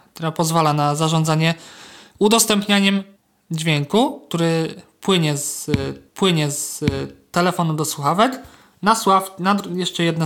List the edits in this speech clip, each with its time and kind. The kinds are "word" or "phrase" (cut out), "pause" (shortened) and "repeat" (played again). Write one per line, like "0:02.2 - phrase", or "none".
0:03.2 - pause
0:06.1 - repeat